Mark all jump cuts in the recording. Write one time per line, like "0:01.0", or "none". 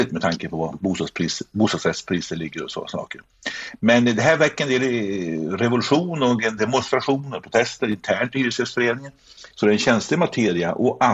0:06.6
0:09.5